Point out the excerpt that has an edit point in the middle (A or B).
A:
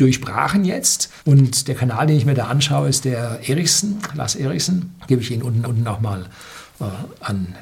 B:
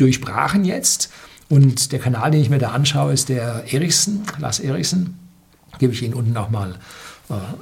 A